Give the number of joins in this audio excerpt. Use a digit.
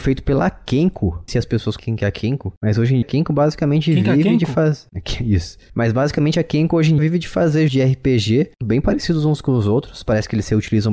6